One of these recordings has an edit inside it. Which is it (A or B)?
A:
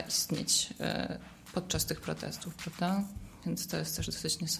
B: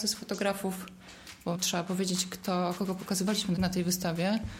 B